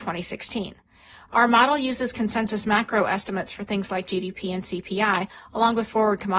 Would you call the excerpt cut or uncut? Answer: uncut